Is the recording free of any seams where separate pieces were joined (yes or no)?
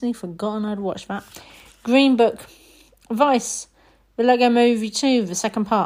yes